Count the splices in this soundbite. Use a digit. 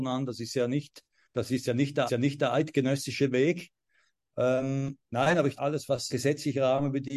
5